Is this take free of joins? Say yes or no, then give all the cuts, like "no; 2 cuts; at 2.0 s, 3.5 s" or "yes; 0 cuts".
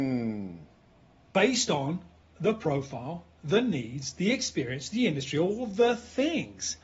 yes; 0 cuts